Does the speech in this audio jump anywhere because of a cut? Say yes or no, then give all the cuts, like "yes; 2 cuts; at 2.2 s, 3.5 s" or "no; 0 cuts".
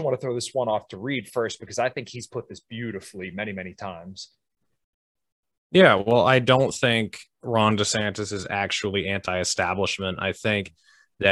no; 0 cuts